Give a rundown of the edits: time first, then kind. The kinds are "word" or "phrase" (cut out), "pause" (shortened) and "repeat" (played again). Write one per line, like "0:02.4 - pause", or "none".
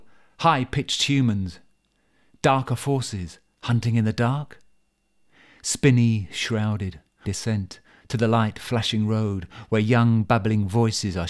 0:07.2 - word